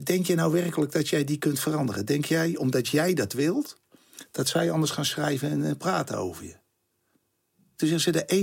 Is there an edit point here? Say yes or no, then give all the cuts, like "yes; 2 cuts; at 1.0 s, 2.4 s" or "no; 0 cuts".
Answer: no; 0 cuts